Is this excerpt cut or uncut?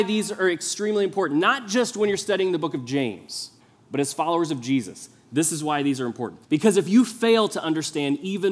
cut